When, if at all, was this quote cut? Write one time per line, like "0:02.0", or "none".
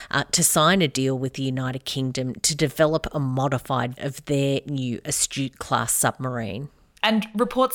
0:04.0